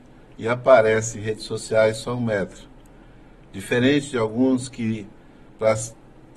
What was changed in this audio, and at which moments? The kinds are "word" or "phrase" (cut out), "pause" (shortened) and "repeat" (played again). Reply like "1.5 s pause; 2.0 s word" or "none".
none